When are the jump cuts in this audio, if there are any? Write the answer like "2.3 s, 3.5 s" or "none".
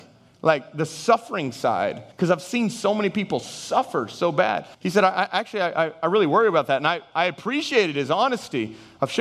2.1 s, 4.7 s